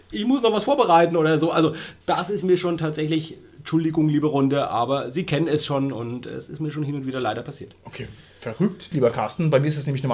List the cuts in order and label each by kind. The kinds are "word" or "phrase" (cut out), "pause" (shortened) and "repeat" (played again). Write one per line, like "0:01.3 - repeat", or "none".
none